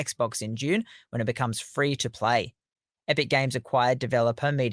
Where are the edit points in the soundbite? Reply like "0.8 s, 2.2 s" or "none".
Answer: none